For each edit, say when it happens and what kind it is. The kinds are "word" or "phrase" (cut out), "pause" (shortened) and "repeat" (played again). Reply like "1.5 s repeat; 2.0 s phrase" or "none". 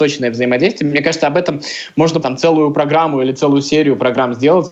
2.2 s word